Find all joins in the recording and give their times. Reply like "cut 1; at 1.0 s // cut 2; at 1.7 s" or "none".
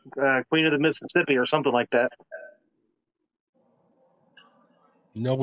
none

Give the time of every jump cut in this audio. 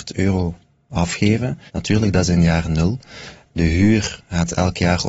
cut 1; at 1.7 s

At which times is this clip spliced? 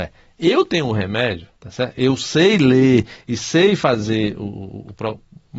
cut 1; at 1.6 s

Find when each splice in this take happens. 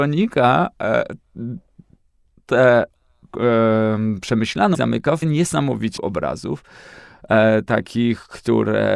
cut 1; at 3.3 s // cut 2; at 4.7 s // cut 3; at 5.2 s // cut 4; at 6.0 s

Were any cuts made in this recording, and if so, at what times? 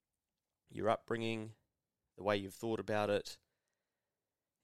none

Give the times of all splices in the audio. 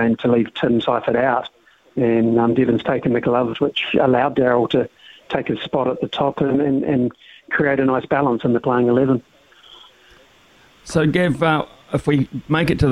none

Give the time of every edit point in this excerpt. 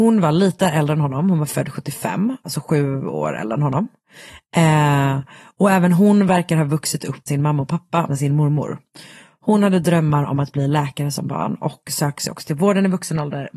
cut 1; at 2.4 s // cut 2; at 7.3 s // cut 3; at 8.1 s

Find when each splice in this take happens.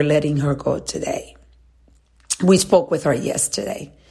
none

